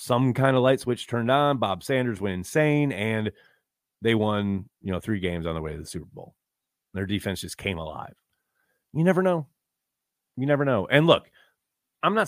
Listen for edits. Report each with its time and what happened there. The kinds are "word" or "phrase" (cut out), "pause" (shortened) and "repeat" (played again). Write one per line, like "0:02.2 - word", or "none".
none